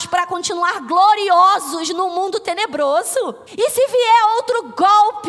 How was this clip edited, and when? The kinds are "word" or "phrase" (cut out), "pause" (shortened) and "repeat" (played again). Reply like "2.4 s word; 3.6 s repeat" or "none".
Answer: 3.5 s pause